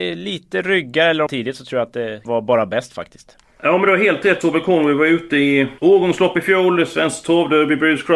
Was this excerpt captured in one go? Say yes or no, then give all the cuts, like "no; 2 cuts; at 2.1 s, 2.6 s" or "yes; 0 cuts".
no; 5 cuts; at 1.3 s, 2.2 s, 3.4 s, 4.4 s, 5.8 s